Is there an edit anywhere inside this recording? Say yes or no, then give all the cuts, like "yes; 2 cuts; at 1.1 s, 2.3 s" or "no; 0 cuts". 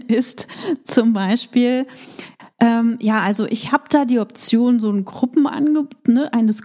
no; 0 cuts